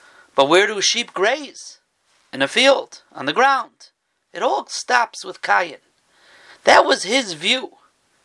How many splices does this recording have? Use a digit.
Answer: 0